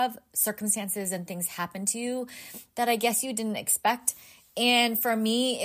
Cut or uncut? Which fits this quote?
uncut